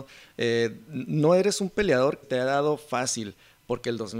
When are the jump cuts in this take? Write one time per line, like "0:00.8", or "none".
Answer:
0:02.2